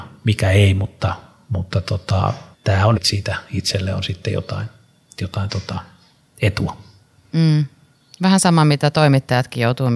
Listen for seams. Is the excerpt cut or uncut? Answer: cut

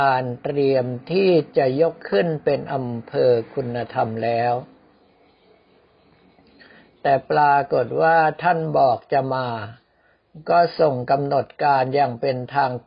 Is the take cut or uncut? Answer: cut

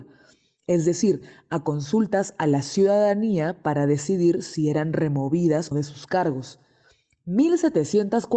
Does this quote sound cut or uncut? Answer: cut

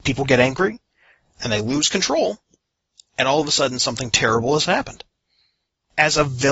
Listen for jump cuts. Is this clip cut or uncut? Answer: uncut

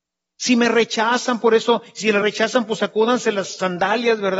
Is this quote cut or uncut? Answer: uncut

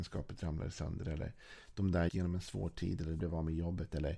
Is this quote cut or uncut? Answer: cut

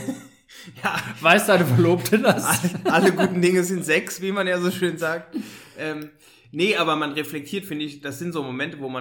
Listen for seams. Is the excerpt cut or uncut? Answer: uncut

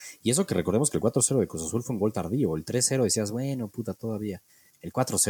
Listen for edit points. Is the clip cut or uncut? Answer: uncut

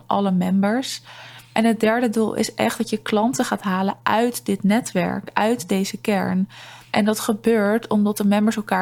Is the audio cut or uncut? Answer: uncut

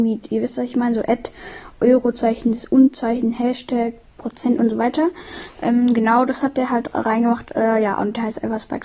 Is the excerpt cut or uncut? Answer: uncut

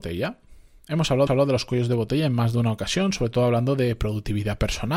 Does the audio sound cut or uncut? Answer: cut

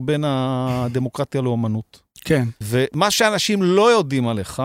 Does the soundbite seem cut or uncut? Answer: cut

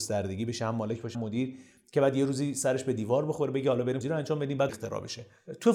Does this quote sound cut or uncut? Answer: cut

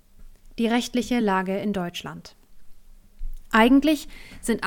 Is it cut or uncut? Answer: uncut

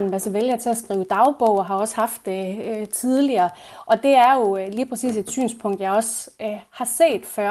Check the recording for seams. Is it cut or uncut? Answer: uncut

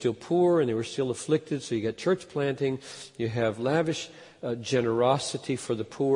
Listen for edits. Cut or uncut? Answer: uncut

